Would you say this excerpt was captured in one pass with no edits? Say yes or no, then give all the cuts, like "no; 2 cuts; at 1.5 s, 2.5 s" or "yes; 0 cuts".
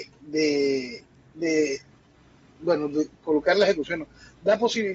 yes; 0 cuts